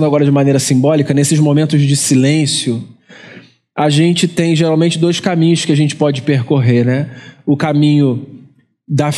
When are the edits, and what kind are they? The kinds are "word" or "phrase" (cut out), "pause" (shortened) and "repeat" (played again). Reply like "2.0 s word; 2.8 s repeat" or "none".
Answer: none